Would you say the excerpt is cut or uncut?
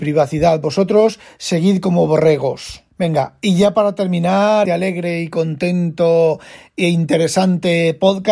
cut